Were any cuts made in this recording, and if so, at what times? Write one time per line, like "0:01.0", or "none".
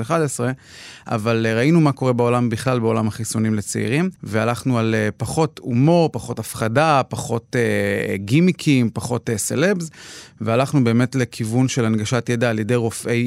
0:04.2